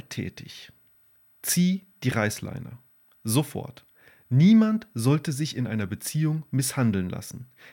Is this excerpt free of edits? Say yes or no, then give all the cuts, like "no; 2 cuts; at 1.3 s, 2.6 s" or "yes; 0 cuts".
yes; 0 cuts